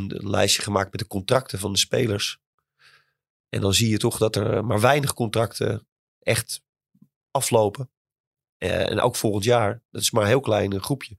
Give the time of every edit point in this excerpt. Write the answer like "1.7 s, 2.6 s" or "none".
none